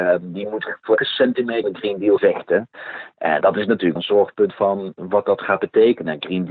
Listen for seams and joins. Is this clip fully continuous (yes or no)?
no